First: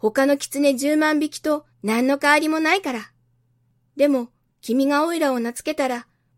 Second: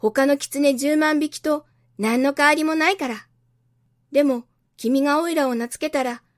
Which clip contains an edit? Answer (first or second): first